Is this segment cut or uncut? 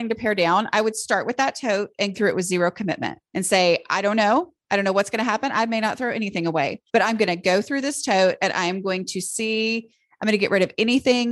cut